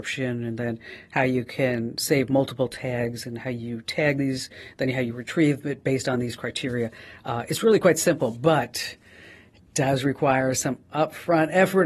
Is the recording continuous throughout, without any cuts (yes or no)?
yes